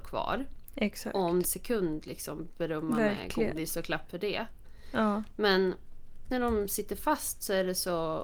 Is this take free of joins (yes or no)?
no